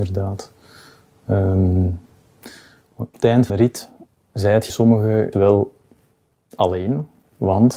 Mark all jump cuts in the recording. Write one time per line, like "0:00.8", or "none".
0:03.1
0:03.5
0:04.7
0:05.3